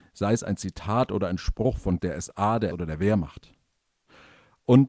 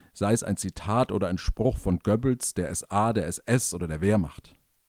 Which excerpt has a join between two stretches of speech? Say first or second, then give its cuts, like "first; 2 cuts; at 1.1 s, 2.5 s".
first; 2 cuts; at 2.0 s, 2.7 s